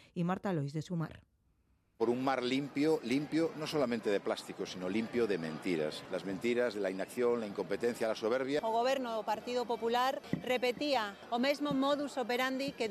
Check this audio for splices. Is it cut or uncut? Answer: uncut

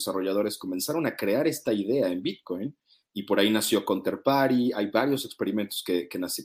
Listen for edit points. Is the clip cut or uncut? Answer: uncut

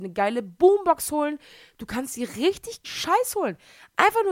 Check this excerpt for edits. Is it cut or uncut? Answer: cut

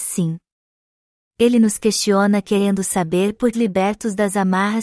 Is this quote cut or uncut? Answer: cut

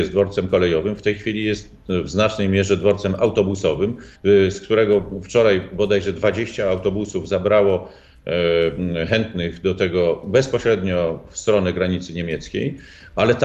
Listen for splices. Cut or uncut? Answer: cut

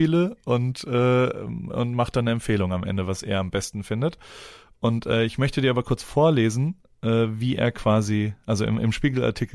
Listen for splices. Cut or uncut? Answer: uncut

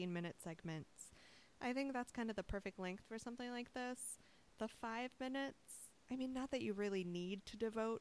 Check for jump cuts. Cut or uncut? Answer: cut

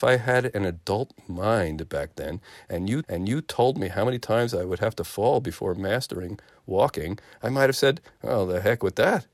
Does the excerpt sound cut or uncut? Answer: cut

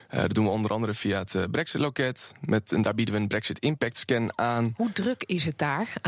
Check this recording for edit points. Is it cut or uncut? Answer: uncut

